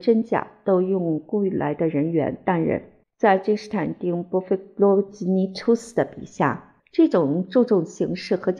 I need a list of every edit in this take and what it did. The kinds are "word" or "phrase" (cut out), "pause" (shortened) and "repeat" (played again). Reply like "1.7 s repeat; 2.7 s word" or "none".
3.0 s pause; 6.8 s pause